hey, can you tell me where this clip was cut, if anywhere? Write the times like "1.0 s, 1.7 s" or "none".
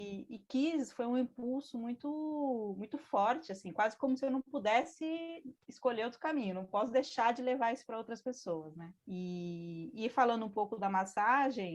9.0 s